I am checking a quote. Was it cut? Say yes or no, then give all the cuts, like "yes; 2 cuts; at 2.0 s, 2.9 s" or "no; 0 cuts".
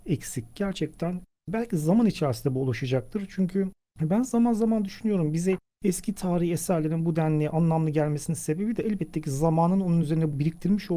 no; 0 cuts